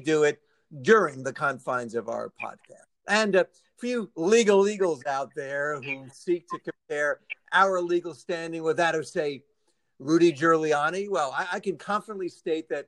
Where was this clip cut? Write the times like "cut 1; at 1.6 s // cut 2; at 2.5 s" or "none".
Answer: none